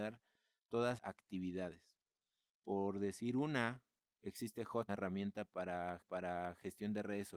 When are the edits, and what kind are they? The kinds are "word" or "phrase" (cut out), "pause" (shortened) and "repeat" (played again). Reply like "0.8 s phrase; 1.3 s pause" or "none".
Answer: 1.0 s word; 4.9 s phrase; 6.0 s repeat